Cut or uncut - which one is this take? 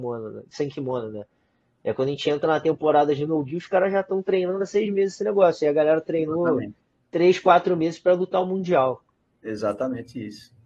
uncut